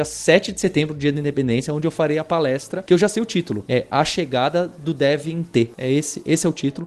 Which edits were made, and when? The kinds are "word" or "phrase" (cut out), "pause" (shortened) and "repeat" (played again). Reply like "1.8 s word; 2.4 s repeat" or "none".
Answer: none